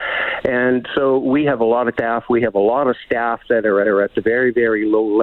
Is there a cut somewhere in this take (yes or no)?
yes